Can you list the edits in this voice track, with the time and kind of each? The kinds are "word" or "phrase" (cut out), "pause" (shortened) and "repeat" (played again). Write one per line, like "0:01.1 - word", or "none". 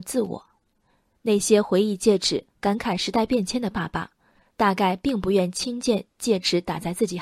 0:02.5 - pause